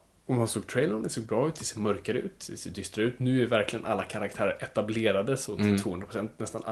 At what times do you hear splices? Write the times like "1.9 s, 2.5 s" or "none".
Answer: none